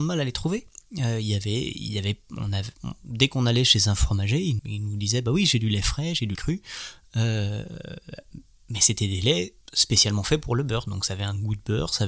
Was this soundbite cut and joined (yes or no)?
yes